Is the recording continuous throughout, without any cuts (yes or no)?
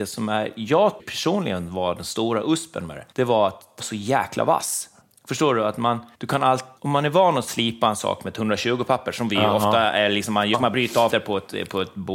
no